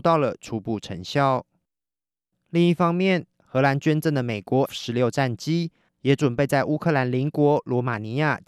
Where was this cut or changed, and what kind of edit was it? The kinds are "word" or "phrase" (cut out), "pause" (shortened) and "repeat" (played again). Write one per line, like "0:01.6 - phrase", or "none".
0:04.7 - word